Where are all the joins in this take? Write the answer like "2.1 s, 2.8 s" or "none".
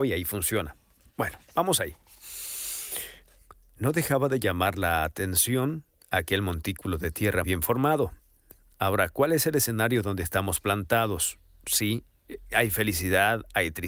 7.4 s